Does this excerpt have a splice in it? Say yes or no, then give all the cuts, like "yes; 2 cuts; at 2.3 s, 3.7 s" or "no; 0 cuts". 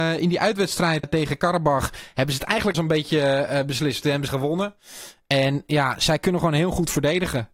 yes; 3 cuts; at 1.0 s, 2.7 s, 4.3 s